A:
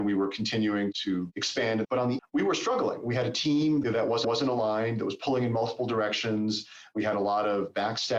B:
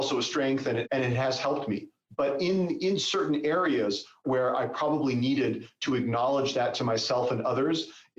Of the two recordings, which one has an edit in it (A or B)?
A